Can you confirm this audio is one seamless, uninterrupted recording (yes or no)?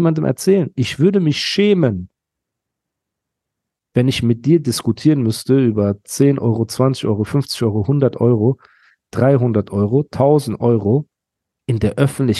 yes